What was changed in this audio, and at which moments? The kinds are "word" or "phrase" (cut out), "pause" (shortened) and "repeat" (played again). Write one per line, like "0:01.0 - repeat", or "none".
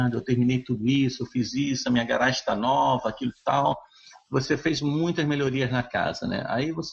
none